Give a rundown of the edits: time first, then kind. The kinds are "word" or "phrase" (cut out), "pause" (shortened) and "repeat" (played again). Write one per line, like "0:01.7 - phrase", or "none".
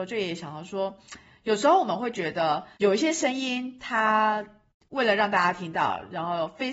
0:02.7 - pause